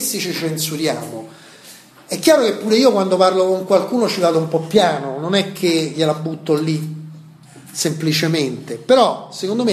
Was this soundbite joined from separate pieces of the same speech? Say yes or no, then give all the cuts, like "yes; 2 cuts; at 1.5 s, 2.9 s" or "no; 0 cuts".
no; 0 cuts